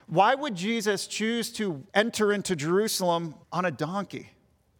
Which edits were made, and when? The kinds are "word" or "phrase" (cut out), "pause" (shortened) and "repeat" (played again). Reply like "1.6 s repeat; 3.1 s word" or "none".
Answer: 1.9 s pause; 3.4 s pause